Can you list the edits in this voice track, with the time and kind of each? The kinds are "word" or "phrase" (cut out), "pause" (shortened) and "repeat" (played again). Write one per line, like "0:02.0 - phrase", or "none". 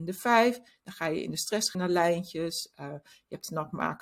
0:01.7 - word